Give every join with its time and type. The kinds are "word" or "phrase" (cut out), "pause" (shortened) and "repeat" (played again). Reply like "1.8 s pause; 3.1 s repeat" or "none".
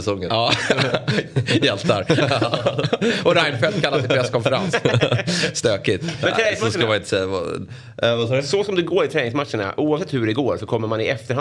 none